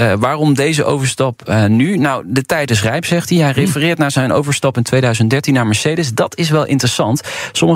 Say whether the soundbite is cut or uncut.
uncut